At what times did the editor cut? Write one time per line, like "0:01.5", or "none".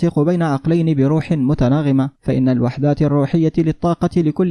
0:02.1